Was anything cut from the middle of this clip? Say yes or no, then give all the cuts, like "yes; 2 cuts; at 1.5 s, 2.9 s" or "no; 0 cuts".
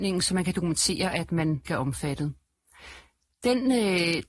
yes; 1 cut; at 1.7 s